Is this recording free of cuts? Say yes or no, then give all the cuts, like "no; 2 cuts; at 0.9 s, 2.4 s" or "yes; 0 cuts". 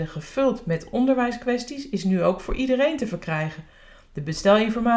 yes; 0 cuts